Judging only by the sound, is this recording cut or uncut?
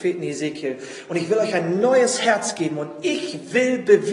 uncut